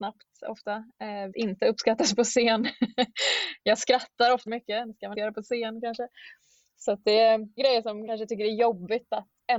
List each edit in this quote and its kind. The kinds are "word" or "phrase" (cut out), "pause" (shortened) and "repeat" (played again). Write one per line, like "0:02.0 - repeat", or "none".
0:01.3 - word
0:04.5 - word
0:05.1 - word
0:07.6 - word
0:08.1 - word